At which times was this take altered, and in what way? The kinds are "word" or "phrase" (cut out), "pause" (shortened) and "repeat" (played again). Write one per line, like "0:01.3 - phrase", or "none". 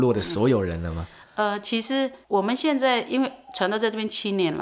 0:02.2 - pause